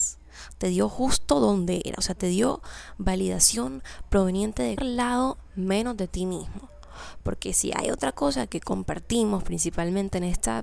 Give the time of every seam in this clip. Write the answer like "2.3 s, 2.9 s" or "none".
4.8 s

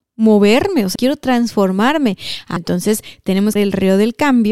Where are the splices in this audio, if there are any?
1.0 s, 2.6 s, 3.6 s

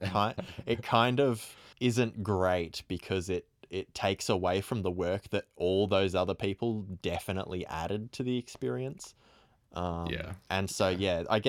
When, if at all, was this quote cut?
1.7 s

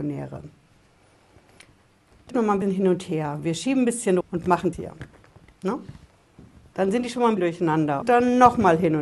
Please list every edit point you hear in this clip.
2.3 s, 2.6 s, 4.2 s, 4.7 s, 7.4 s, 8.0 s

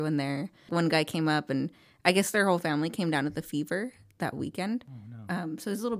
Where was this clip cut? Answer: none

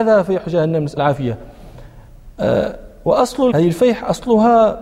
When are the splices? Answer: 1.0 s, 3.5 s

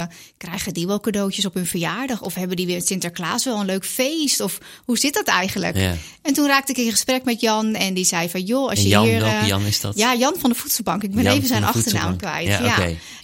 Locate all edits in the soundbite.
none

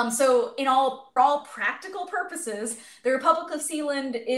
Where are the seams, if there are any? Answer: 1.2 s

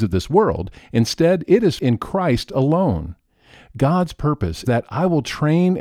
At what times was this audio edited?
1.8 s, 4.6 s

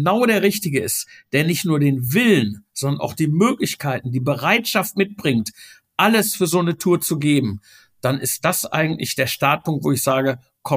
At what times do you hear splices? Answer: none

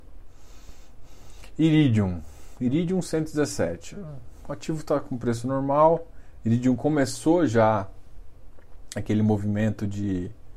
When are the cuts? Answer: none

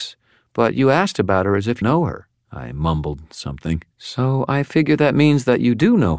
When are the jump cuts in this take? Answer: 1.8 s, 2.3 s, 3.9 s

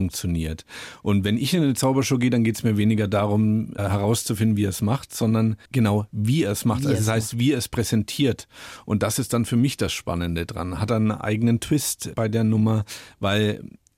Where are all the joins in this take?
5.6 s

